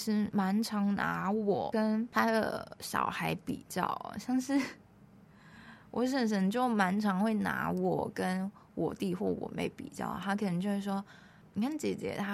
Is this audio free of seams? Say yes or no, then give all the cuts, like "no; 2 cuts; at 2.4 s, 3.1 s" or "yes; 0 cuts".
yes; 0 cuts